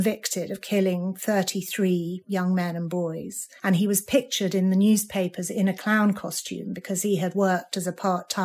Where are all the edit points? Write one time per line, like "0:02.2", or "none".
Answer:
0:03.6